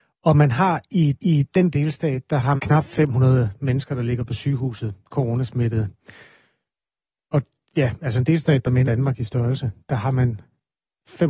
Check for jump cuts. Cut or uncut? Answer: cut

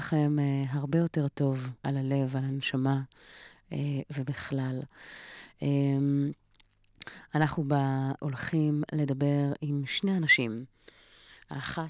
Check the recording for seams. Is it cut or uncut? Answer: cut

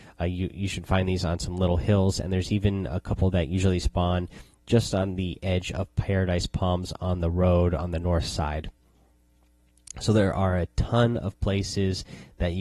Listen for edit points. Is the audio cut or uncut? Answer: uncut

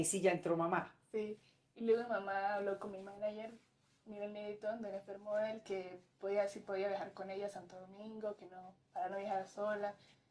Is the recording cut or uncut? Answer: uncut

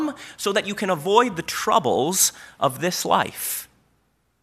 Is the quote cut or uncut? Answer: uncut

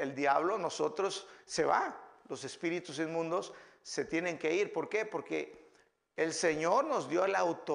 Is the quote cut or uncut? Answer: uncut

